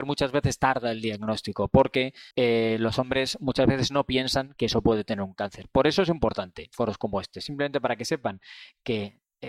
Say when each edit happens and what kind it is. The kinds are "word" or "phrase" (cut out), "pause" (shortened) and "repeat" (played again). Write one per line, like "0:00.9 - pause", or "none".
0:02.3 - pause